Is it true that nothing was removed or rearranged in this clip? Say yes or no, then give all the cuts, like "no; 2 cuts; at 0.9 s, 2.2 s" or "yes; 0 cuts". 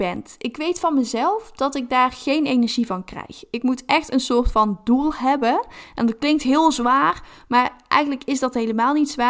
yes; 0 cuts